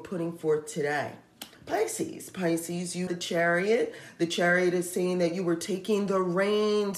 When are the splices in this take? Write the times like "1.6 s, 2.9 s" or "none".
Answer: 1.5 s, 3.1 s